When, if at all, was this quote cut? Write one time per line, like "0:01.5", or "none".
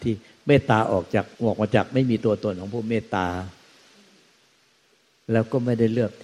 0:01.3